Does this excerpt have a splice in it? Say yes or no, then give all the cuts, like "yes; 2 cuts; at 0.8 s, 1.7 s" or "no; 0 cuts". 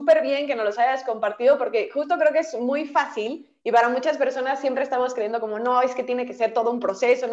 no; 0 cuts